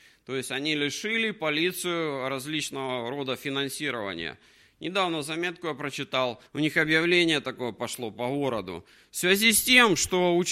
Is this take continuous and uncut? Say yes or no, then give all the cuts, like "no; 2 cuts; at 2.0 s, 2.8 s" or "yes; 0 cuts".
no; 1 cut; at 6.5 s